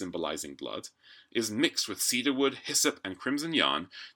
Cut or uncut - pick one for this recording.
uncut